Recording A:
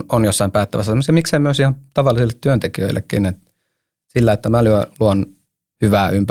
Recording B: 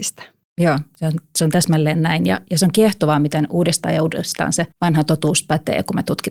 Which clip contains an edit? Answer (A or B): B